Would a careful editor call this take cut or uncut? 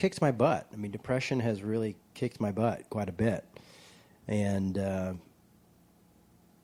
cut